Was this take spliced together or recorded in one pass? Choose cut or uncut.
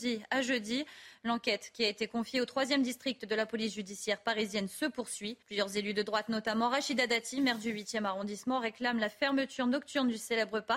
cut